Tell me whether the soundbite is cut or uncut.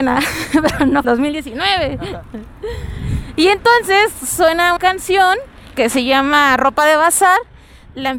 cut